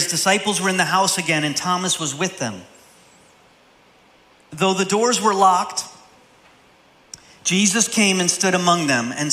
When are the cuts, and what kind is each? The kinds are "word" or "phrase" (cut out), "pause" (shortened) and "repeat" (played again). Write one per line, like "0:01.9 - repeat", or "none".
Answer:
none